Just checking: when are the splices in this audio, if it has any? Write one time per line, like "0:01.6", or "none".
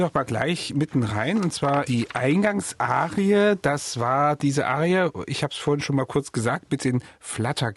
0:01.9